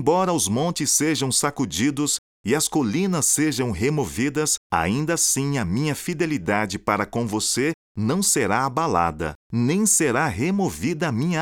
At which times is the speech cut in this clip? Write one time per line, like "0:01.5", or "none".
0:04.6
0:09.4